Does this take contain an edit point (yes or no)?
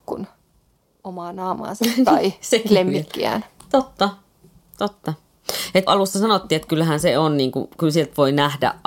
yes